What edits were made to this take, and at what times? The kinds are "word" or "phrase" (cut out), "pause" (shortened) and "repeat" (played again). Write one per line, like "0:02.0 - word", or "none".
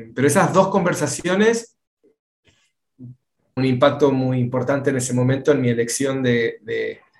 0:03.6 - phrase